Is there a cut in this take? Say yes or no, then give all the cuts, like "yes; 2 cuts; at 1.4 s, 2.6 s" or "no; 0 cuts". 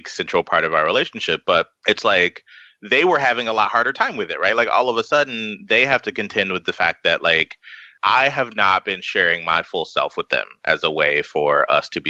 no; 0 cuts